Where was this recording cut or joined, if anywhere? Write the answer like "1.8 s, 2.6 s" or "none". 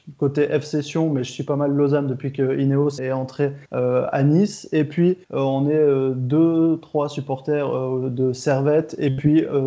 3.0 s, 3.7 s, 5.2 s

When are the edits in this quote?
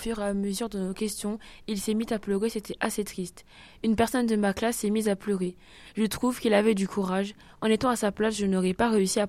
none

